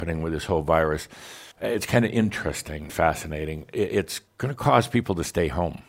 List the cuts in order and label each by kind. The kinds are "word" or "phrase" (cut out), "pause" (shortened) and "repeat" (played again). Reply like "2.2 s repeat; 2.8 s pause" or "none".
1.5 s pause; 2.9 s word; 4.3 s pause